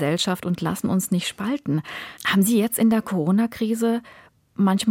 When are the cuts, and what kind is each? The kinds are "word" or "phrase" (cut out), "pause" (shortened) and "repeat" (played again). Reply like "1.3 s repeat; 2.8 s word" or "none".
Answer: 2.2 s pause